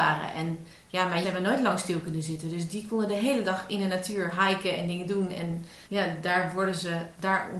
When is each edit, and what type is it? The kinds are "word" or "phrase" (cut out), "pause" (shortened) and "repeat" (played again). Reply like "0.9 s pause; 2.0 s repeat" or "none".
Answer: 1.2 s word; 5.8 s pause